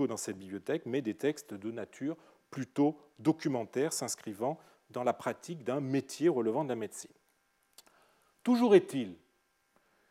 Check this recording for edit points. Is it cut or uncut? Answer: uncut